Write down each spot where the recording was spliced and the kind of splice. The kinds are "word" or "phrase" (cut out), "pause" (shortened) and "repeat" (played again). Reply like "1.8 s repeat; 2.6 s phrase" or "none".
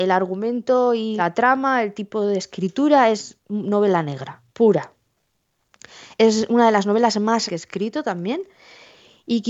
1.2 s word; 4.5 s pause; 7.5 s word